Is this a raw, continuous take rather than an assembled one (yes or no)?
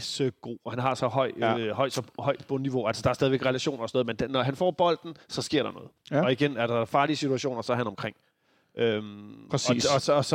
yes